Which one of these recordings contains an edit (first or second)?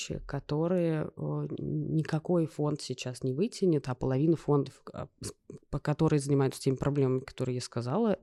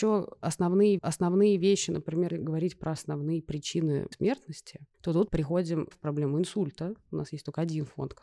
second